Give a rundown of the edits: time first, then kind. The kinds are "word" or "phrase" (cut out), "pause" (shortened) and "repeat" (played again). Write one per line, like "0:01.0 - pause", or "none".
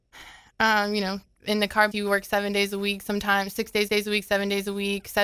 0:01.9 - word
0:03.9 - repeat